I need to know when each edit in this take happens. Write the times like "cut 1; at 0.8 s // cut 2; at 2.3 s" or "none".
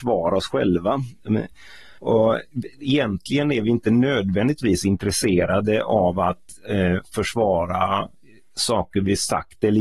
cut 1; at 2.0 s